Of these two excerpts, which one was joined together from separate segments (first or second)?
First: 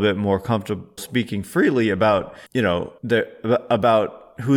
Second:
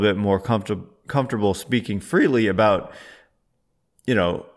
first